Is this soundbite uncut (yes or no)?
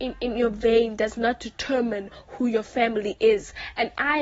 yes